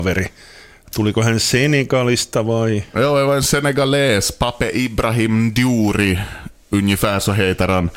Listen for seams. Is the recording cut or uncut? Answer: uncut